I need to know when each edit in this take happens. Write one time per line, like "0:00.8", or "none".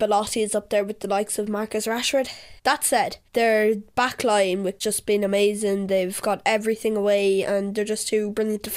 0:02.6
0:03.3
0:04.8